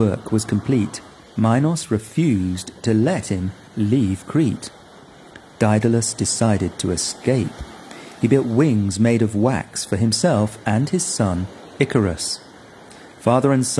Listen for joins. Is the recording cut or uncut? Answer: uncut